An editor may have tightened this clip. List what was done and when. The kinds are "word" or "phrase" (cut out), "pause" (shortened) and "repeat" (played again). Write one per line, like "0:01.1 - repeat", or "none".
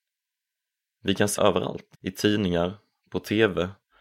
0:01.4 - word
0:01.9 - pause